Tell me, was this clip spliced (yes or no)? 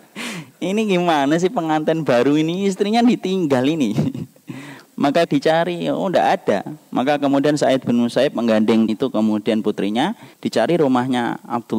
yes